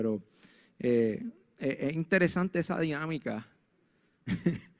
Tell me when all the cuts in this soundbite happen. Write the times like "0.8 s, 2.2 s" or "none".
none